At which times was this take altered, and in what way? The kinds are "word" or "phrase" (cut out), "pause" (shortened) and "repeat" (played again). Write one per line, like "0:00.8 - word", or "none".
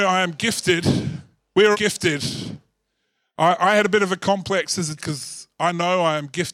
0:01.7 - word
0:05.0 - word